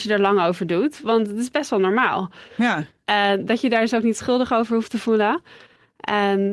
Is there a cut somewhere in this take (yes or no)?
no